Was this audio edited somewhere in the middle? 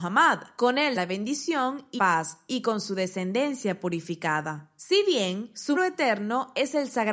yes; 3 cuts; at 1.0 s, 2.0 s, 5.8 s

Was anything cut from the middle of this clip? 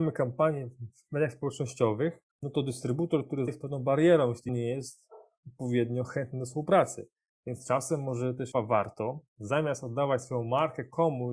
yes; 5 cuts; at 2.3 s, 3.5 s, 4.5 s, 8.5 s, 9.3 s

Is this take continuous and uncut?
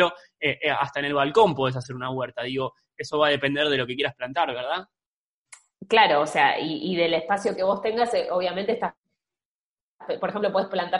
yes; 0 cuts

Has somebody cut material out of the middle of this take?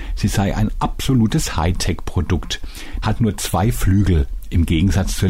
yes; 1 cut; at 3.0 s

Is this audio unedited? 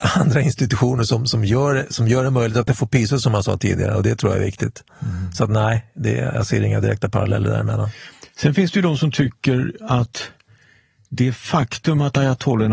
yes; 0 cuts

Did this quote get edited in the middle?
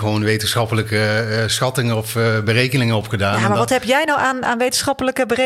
no; 0 cuts

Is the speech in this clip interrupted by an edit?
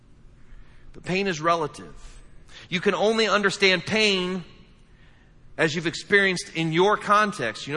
no; 0 cuts

